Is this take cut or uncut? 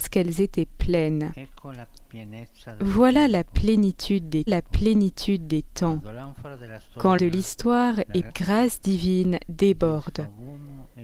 cut